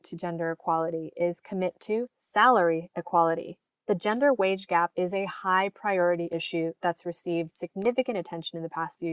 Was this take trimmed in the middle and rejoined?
no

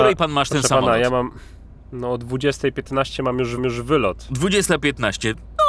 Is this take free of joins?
no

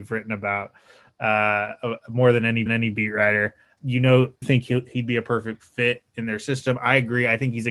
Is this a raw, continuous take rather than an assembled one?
no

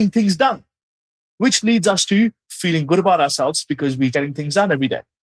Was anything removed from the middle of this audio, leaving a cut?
yes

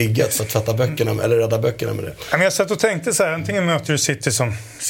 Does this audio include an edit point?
no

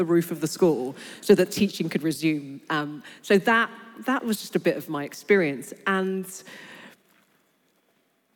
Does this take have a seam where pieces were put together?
no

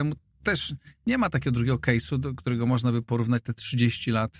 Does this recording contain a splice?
no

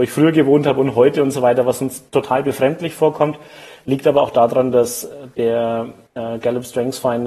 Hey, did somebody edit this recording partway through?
no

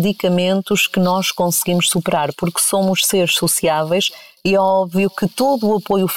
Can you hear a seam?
no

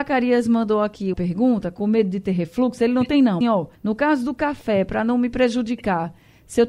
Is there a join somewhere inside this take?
yes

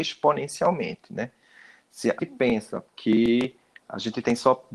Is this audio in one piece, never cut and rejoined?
no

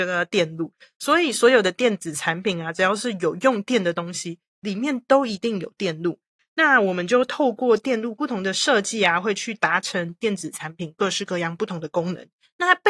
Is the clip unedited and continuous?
yes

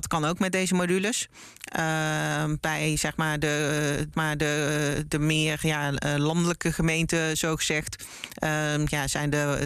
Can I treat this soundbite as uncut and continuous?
no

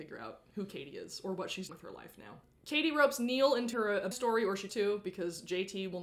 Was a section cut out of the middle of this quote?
yes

